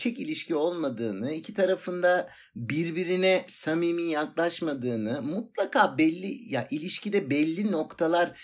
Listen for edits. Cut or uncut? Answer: uncut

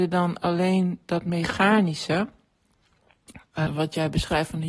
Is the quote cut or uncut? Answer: cut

